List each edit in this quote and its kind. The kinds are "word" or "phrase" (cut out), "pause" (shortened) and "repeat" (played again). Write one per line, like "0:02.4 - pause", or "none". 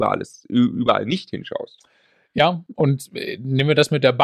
none